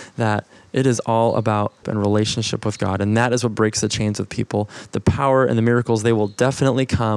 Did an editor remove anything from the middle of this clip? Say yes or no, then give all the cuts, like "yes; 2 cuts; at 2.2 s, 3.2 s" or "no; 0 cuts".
yes; 1 cut; at 1.8 s